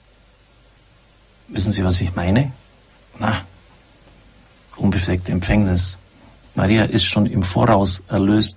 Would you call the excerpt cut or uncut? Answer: uncut